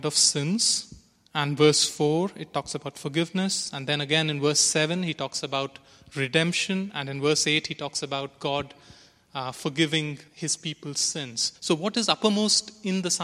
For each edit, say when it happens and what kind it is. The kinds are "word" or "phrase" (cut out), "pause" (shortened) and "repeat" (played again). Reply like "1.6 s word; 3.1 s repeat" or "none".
10.3 s pause; 11.6 s pause

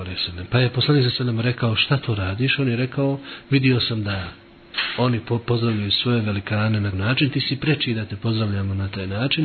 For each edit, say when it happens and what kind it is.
6.9 s word

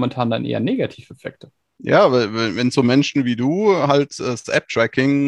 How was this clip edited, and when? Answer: none

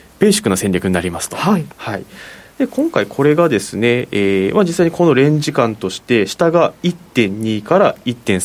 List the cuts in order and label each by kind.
1.7 s pause

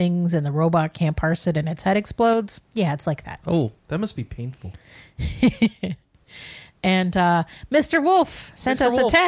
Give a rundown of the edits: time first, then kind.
2.6 s pause; 3.8 s pause

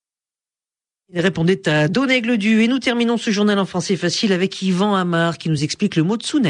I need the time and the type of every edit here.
none

